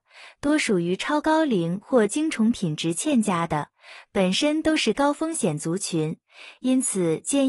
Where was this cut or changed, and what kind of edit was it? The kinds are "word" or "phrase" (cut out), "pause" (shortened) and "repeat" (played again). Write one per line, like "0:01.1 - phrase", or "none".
none